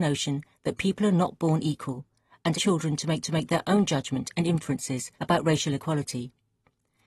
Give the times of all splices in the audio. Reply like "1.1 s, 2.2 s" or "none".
2.5 s, 3.2 s, 5.1 s